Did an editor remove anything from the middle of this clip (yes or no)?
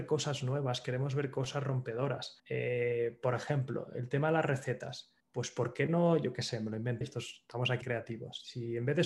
yes